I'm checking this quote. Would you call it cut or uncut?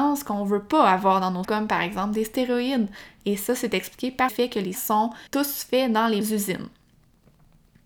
cut